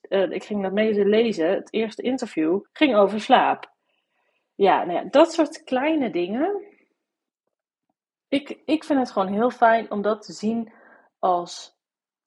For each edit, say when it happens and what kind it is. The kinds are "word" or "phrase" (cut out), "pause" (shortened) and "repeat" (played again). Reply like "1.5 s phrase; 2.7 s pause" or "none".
2.7 s pause